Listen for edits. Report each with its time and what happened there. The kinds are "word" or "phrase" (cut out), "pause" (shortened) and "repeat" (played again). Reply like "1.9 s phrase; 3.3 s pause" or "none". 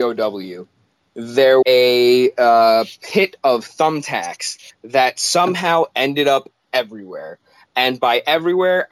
1.6 s word